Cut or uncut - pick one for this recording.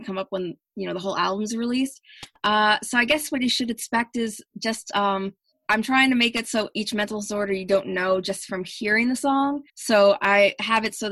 cut